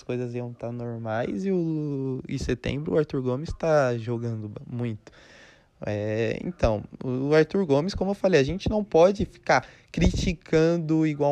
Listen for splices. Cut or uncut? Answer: uncut